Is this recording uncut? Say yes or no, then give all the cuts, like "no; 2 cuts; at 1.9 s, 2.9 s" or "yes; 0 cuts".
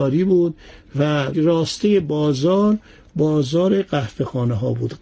no; 1 cut; at 1.3 s